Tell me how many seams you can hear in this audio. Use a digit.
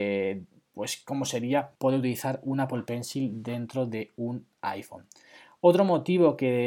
1